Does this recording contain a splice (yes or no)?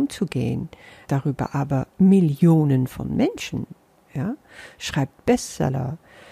yes